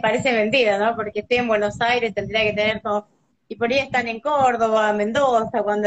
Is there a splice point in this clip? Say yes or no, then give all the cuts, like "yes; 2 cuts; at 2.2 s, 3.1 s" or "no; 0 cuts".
no; 0 cuts